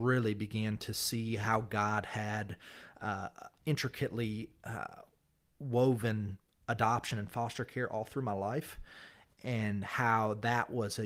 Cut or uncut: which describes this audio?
uncut